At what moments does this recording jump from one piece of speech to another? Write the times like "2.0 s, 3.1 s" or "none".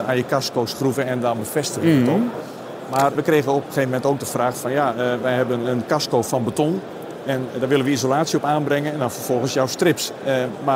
3.2 s